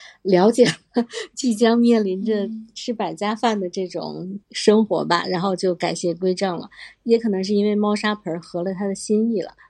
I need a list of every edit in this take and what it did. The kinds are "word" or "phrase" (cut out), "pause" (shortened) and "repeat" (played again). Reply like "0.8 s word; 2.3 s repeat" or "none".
4.4 s pause